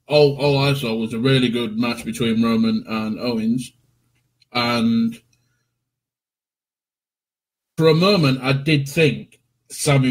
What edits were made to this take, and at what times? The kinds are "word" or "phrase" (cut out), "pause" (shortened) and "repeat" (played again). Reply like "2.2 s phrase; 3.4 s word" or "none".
none